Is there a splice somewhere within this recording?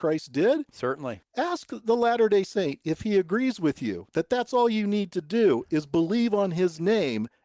yes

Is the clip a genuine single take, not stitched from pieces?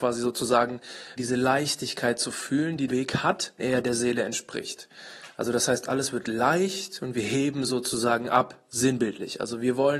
no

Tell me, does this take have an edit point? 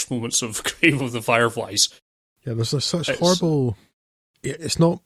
no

